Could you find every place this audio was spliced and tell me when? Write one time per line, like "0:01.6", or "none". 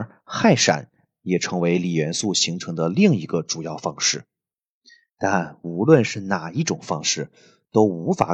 none

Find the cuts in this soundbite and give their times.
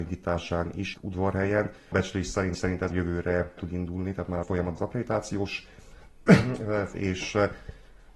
0:00.9
0:01.9
0:02.5
0:02.9
0:03.6
0:04.4
0:04.8
0:06.9

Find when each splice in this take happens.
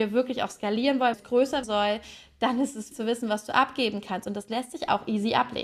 0:01.1
0:01.6
0:02.9

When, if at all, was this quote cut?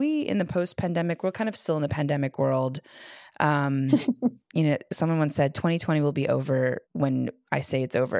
0:06.8

